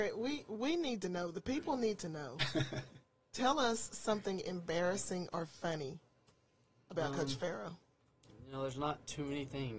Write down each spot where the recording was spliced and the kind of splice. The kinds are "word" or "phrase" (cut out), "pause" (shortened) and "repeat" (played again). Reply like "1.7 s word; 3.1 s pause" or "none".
none